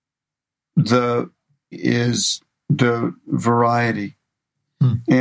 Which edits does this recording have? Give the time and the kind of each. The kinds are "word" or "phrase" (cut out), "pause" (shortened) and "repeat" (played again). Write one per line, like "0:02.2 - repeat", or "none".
0:01.7 - word